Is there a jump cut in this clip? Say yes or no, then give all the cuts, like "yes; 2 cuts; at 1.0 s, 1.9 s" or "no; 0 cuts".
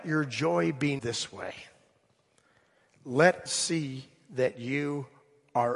yes; 2 cuts; at 1.0 s, 3.5 s